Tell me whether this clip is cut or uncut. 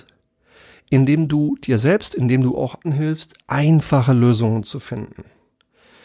cut